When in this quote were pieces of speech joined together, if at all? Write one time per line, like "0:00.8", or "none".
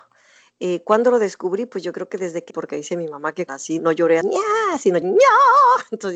0:02.5
0:03.5
0:03.8
0:04.2
0:05.0